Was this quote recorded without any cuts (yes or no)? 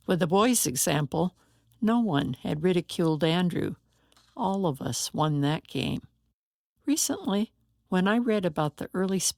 yes